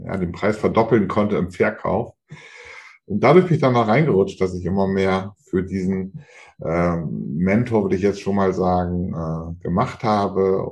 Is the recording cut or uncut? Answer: uncut